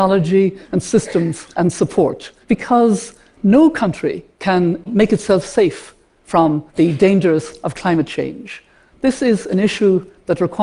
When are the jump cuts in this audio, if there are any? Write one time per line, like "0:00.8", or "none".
0:01.5
0:02.4
0:04.3
0:06.7

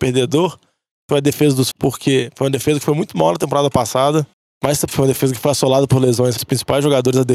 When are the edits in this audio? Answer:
0:01.7
0:04.3
0:04.9
0:06.4

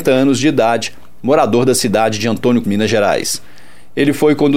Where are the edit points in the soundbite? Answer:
0:02.6

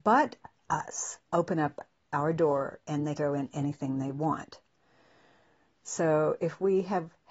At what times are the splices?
0:01.3
0:03.2

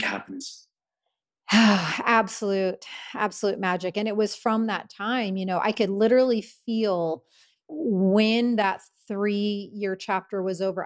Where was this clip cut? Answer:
none

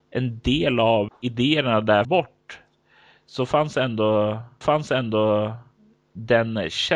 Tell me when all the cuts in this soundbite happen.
0:01.1
0:02.0
0:04.6

